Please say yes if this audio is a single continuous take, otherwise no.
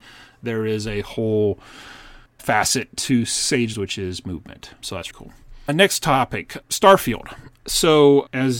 no